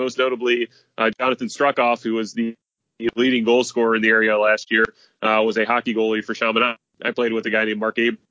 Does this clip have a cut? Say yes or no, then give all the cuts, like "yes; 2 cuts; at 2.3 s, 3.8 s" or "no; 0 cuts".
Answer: no; 0 cuts